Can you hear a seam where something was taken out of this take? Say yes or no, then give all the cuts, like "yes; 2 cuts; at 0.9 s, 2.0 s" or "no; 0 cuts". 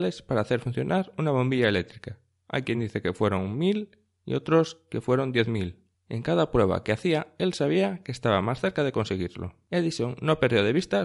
no; 0 cuts